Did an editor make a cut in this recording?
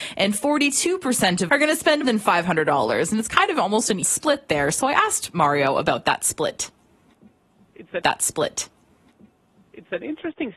yes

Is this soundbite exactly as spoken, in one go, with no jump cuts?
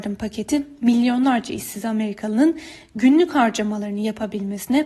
yes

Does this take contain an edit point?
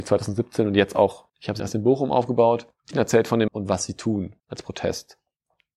yes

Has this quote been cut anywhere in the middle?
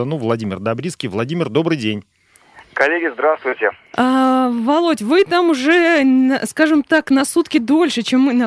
no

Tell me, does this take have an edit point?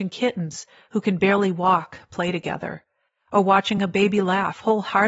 no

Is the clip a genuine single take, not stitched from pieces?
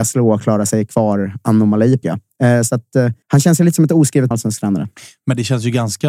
no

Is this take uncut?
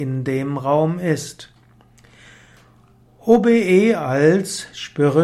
yes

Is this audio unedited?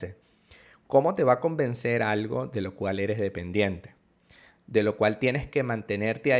yes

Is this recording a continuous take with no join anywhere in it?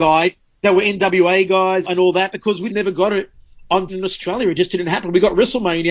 no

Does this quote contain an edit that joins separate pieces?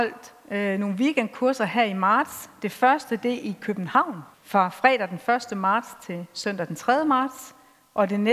yes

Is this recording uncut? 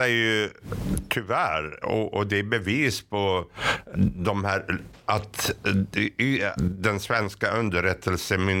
no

